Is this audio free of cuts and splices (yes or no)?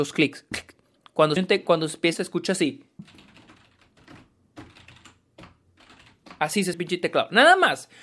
no